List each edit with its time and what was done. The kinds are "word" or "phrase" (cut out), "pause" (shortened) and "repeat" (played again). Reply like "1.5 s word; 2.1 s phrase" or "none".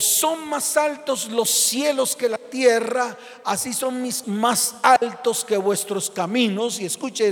4.2 s word